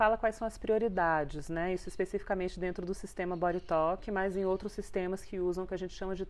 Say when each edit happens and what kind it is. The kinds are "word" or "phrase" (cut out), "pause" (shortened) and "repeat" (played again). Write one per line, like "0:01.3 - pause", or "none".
none